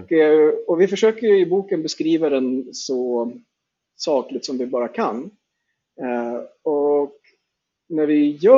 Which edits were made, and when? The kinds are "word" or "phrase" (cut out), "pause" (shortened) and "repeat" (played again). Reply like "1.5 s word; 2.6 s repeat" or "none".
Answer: none